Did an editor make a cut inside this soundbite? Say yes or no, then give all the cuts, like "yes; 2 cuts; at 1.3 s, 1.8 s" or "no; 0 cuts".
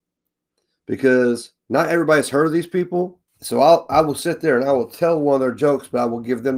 yes; 1 cut; at 3.3 s